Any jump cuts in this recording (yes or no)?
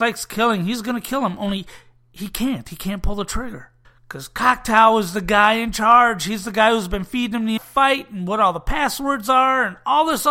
yes